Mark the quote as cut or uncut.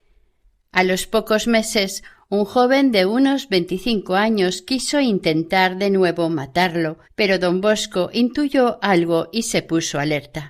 cut